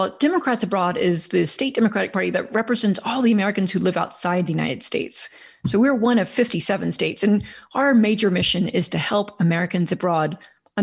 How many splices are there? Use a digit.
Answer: 0